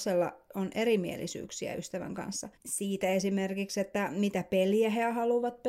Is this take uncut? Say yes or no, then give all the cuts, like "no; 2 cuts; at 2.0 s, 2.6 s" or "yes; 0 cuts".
no; 1 cut; at 2.5 s